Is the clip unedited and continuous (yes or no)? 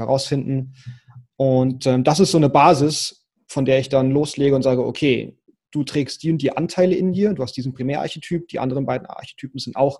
yes